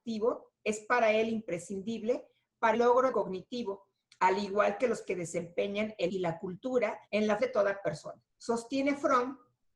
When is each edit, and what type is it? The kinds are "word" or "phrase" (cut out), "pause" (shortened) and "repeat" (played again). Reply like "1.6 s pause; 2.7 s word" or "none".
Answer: 2.7 s word; 3.1 s phrase; 5.0 s word; 6.1 s word; 7.1 s pause; 7.4 s word; 8.3 s pause